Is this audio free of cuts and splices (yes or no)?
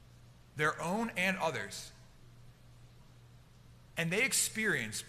yes